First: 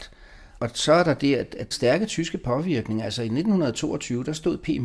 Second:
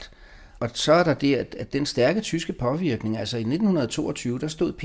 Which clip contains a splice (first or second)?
first